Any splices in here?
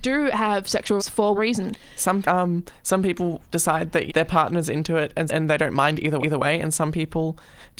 yes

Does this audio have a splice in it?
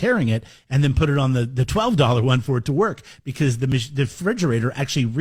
no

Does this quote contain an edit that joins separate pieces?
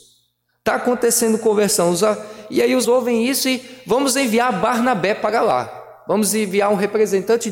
yes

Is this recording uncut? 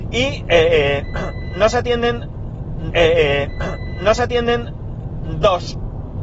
no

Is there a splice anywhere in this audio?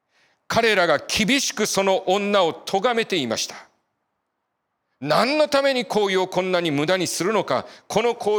no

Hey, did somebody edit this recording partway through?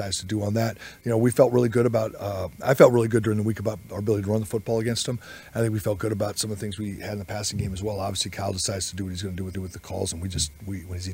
yes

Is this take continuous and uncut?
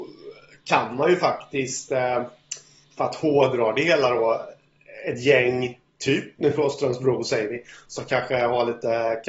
yes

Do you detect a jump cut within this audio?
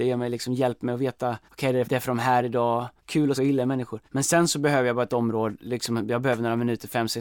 yes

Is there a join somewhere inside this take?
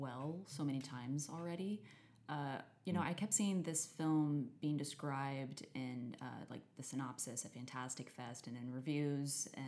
no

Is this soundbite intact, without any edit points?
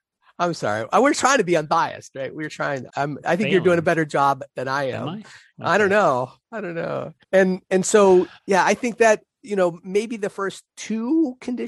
no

